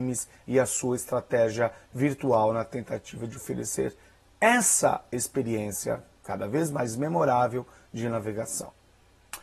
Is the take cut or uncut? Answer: uncut